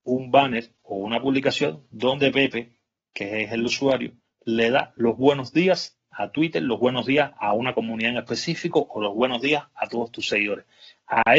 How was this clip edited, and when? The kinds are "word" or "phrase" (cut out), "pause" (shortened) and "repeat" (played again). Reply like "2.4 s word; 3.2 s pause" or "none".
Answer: none